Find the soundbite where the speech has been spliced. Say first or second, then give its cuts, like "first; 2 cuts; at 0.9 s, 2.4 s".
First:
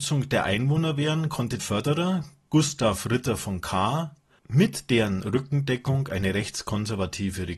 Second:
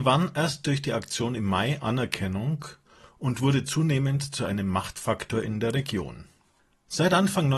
first; 1 cut; at 1.6 s